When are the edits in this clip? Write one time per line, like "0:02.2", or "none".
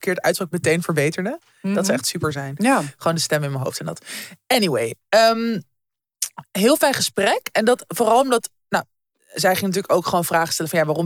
none